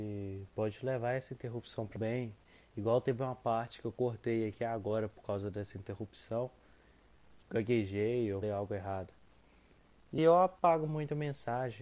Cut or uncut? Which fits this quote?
cut